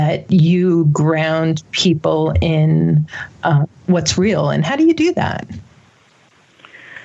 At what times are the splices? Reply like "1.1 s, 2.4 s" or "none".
none